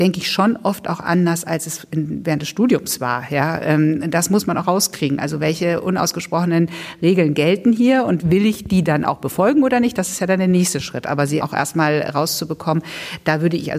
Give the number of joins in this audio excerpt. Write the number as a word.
two